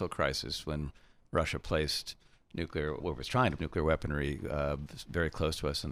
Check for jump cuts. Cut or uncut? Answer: cut